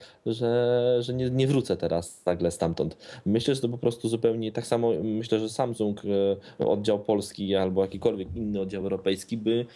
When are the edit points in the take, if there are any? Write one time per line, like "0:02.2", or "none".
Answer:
none